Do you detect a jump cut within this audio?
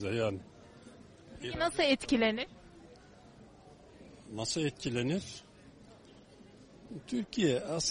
no; 0 cuts

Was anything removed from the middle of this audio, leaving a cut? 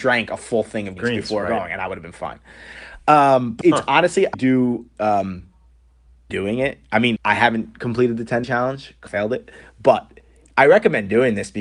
yes; 7 cuts; at 1.0 s, 3.6 s, 4.3 s, 6.3 s, 7.2 s, 8.4 s, 9.1 s

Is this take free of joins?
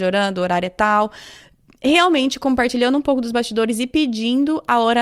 yes; 0 cuts

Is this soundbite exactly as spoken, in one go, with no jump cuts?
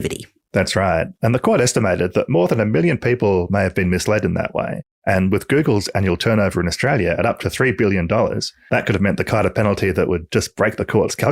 yes; 0 cuts

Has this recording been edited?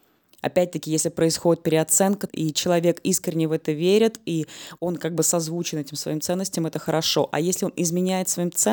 yes; 1 cut; at 2.3 s

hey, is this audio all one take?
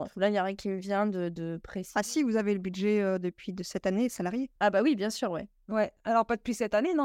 no; 1 cut; at 4.6 s

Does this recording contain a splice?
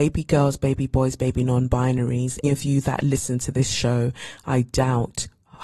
yes; 1 cut; at 2.4 s

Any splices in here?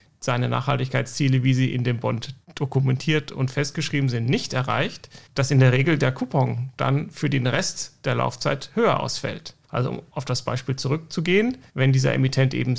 yes; 4 cuts; at 2.4 s, 5.2 s, 9.6 s, 11.7 s

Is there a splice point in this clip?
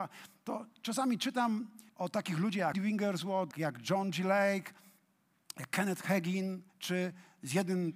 yes; 4 cuts; at 1.9 s, 2.7 s, 3.5 s, 6.7 s

